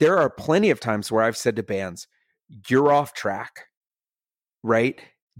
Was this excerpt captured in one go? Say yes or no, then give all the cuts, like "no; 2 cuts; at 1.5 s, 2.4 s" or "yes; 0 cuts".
yes; 0 cuts